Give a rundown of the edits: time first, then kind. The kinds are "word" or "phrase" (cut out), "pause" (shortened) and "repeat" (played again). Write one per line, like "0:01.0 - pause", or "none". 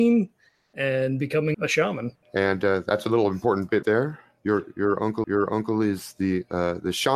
0:01.5 - word
0:02.2 - pause
0:03.8 - word
0:05.2 - repeat